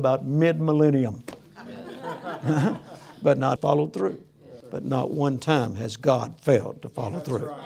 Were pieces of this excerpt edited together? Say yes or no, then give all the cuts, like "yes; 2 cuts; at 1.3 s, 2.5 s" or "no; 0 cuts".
yes; 2 cuts; at 3.6 s, 4.6 s